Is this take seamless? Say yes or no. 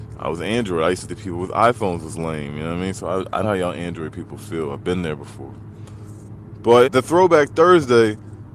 no